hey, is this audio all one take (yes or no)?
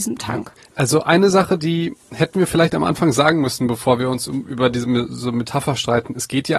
yes